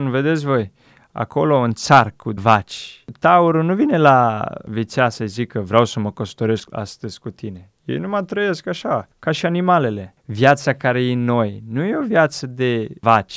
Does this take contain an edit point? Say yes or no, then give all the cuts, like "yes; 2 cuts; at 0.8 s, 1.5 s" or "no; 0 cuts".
yes; 1 cut; at 2.4 s